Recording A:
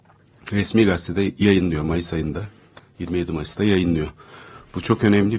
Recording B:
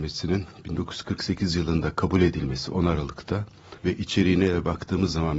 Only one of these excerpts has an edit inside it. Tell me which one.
B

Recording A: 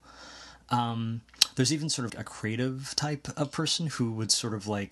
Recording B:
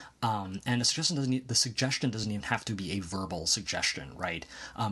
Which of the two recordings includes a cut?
A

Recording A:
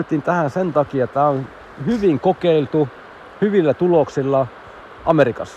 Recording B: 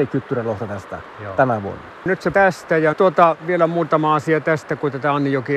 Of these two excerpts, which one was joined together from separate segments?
B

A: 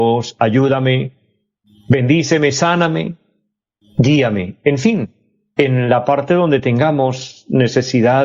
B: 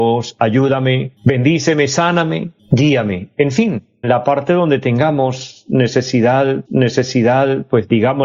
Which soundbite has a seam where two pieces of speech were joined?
B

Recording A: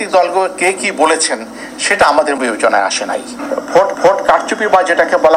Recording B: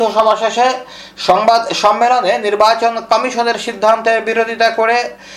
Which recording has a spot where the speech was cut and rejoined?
A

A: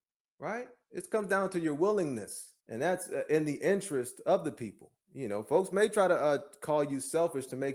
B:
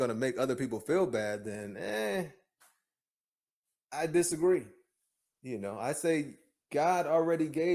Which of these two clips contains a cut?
A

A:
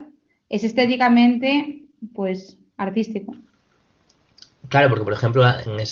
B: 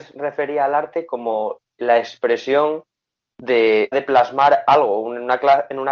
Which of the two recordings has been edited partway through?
B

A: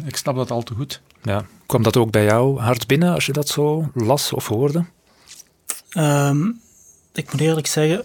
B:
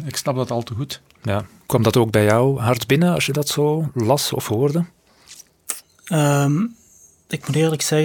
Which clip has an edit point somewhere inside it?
A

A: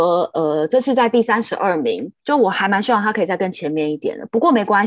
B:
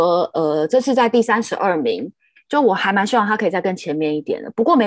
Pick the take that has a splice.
A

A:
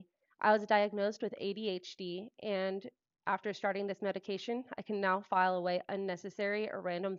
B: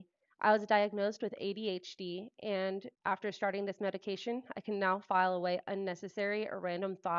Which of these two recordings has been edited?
B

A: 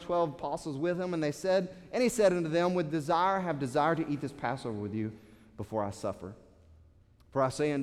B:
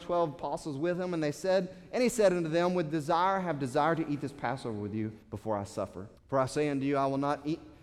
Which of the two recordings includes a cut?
B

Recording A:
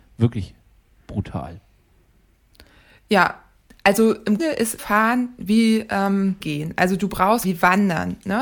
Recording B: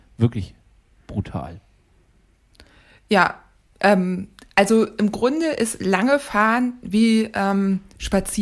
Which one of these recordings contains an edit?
A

